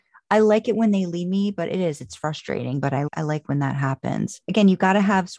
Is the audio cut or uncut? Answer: cut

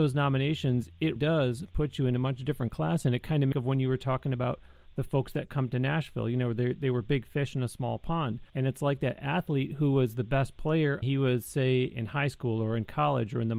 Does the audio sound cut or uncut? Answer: cut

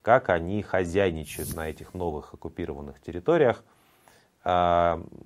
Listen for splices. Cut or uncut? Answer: uncut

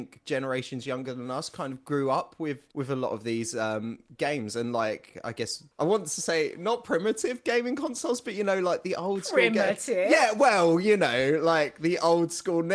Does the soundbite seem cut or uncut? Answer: cut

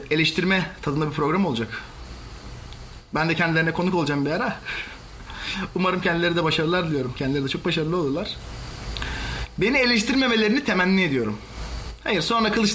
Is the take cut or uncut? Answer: uncut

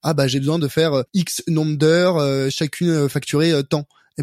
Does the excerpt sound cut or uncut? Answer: cut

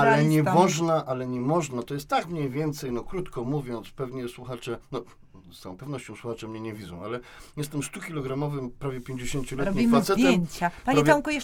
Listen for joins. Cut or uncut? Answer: uncut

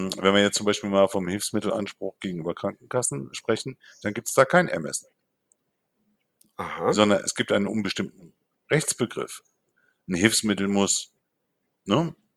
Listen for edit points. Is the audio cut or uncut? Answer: cut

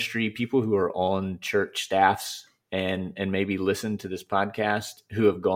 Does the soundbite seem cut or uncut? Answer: uncut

